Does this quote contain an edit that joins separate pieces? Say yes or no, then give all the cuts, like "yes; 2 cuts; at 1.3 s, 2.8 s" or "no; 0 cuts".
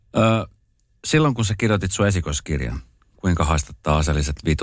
no; 0 cuts